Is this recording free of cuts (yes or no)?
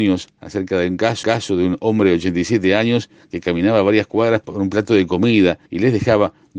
no